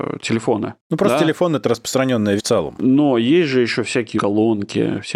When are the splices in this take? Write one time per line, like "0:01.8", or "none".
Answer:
0:02.4
0:04.2